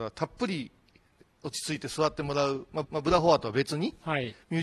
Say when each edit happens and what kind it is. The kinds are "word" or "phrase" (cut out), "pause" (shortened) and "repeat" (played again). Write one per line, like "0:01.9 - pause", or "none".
0:02.8 - repeat